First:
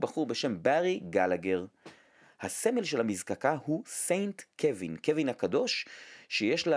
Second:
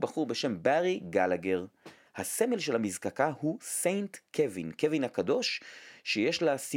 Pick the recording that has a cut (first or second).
second